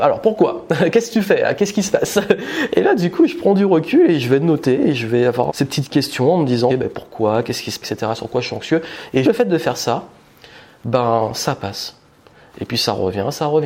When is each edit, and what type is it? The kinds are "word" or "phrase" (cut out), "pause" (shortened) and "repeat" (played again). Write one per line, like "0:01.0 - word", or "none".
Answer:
0:05.5 - word
0:06.7 - word
0:07.8 - word
0:09.2 - word